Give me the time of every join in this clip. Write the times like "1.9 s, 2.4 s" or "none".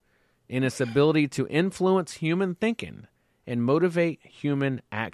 none